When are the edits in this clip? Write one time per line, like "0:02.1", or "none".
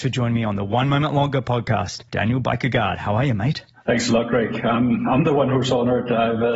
0:02.1